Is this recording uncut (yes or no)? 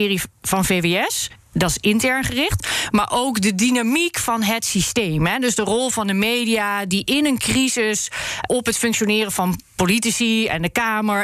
no